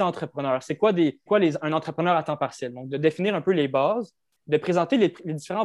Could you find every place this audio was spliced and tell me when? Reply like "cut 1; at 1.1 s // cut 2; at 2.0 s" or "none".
cut 1; at 1.3 s